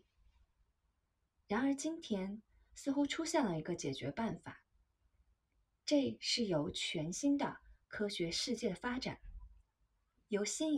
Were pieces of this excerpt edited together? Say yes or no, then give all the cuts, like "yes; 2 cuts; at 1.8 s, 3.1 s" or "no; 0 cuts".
no; 0 cuts